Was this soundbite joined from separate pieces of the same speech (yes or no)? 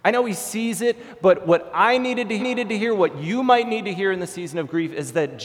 yes